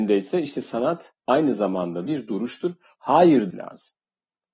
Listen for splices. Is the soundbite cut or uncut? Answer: cut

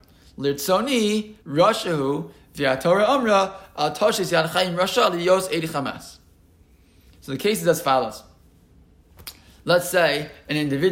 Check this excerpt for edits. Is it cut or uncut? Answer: cut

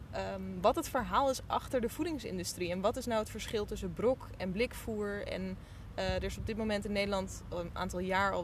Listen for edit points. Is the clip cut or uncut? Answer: uncut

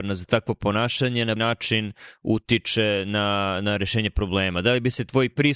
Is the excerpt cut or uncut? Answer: cut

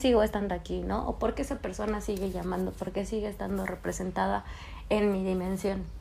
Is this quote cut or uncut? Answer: uncut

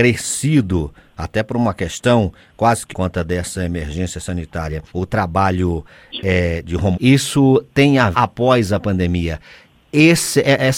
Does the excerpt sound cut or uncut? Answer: cut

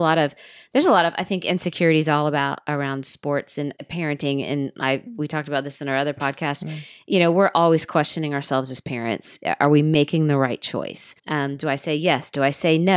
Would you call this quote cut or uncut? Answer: cut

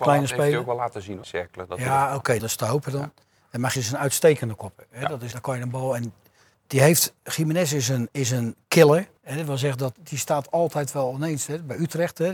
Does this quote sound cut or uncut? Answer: cut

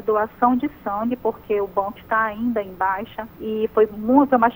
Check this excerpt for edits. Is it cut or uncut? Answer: cut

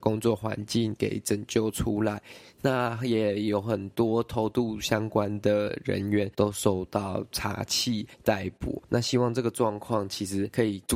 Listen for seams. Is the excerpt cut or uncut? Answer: cut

